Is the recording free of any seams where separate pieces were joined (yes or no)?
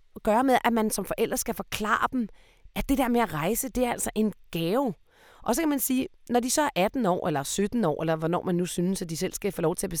yes